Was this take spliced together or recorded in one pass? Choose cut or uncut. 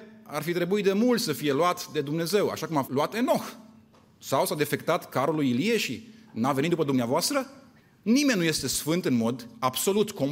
cut